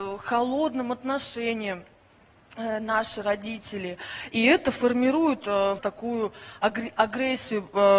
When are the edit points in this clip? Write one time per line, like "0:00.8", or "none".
0:05.8